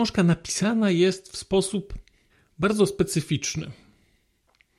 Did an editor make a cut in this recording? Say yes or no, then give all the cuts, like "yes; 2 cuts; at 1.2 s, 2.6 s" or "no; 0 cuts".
yes; 1 cut; at 2.3 s